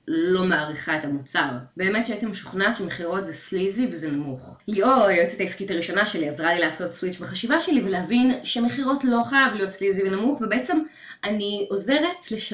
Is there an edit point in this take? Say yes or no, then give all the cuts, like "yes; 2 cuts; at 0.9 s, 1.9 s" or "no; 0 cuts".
yes; 1 cut; at 1.7 s